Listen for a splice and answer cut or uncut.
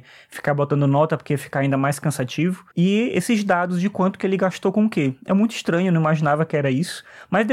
cut